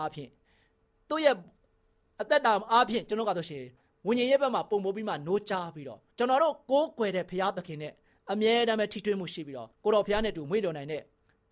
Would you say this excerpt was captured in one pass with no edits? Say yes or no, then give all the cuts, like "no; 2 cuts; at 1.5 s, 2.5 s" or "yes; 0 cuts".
no; 2 cuts; at 6.1 s, 9.7 s